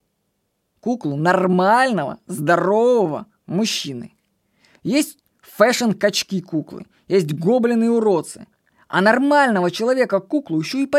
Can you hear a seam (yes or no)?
no